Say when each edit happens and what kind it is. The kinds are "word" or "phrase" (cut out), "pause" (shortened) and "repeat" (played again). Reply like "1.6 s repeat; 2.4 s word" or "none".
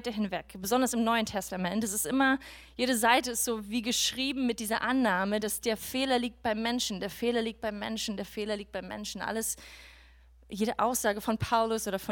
none